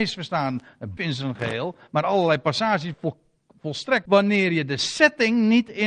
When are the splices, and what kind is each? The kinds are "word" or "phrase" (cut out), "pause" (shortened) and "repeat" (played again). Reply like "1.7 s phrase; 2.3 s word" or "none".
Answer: 1.0 s word; 2.9 s word; 4.0 s word